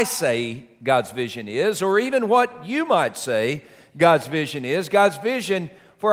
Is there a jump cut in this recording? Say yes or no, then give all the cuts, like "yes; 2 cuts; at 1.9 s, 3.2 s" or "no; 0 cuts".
no; 0 cuts